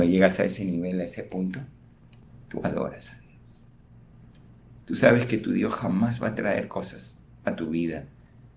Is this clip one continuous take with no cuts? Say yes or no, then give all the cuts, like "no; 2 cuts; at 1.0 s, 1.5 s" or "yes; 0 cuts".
yes; 0 cuts